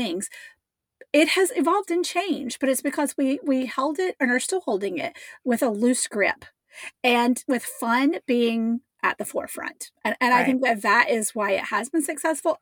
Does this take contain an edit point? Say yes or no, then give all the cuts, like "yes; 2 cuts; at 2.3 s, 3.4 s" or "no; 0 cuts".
yes; 1 cut; at 10.0 s